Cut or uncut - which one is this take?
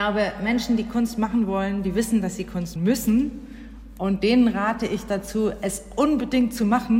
cut